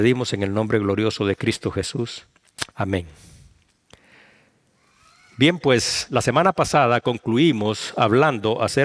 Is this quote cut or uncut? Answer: cut